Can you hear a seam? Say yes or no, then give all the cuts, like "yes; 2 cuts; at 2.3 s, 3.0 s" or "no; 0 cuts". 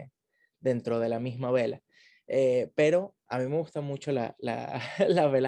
no; 0 cuts